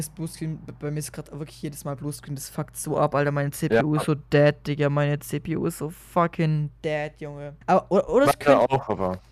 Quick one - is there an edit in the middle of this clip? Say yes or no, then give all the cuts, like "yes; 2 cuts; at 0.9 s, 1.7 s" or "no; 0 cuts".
yes; 1 cut; at 7.6 s